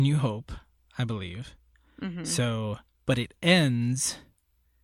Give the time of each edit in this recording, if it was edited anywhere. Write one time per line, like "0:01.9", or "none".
none